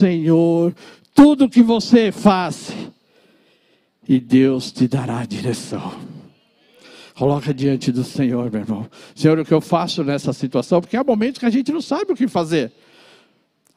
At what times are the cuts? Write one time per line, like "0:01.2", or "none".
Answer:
none